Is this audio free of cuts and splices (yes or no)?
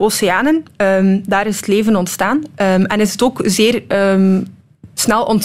yes